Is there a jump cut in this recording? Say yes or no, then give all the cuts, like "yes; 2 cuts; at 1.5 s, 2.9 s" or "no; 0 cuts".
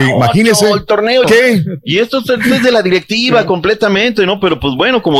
yes; 1 cut; at 1.2 s